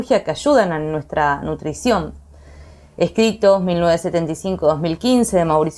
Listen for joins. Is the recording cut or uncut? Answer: uncut